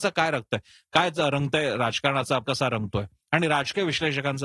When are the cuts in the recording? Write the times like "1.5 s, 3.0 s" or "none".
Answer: 2.4 s